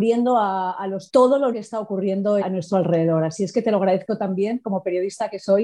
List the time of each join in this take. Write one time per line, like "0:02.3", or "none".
0:01.1
0:01.5
0:02.4

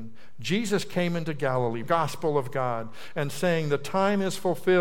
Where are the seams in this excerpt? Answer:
0:01.8

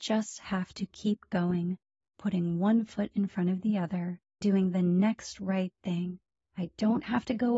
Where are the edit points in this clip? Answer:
0:04.4

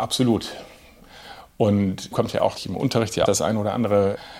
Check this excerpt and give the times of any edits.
0:02.1
0:02.6
0:03.3

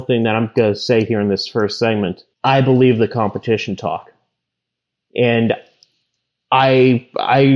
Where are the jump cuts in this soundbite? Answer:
0:02.3
0:04.5

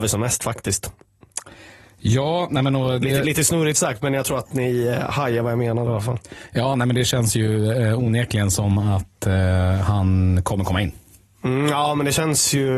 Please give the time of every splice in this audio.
none

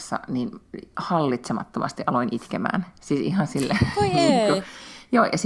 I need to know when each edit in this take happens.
none

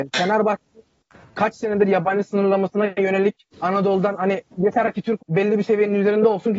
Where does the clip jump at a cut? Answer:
0:03.5
0:04.5
0:05.2

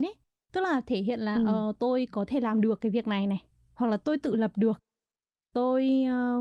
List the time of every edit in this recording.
none

